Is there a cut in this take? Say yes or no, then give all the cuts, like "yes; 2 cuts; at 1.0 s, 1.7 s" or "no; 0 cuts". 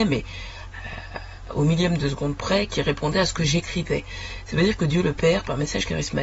no; 0 cuts